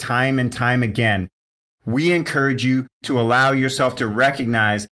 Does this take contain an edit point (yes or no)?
no